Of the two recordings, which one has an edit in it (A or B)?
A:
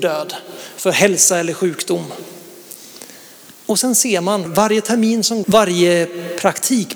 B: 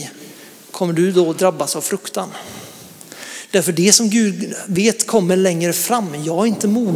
A